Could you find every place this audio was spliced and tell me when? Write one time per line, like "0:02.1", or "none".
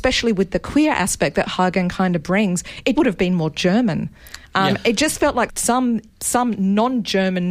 0:02.9
0:05.5